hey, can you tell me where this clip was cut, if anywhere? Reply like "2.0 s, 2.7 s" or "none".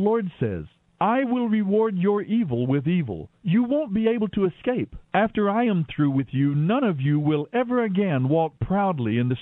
5.0 s